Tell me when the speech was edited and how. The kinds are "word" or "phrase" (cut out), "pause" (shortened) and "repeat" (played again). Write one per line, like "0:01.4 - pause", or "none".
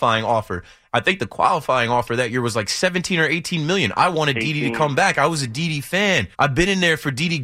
0:06.3 - pause